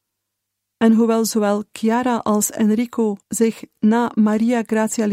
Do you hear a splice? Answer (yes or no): yes